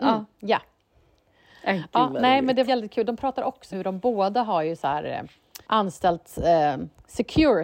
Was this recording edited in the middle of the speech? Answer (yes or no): yes